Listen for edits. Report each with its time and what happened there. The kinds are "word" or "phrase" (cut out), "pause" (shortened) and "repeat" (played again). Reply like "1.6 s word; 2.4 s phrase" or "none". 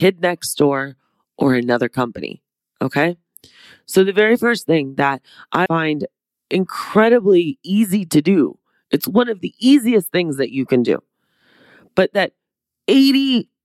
5.7 s word